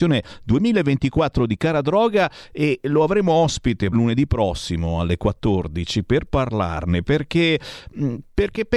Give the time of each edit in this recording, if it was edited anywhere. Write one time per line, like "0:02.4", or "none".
0:03.9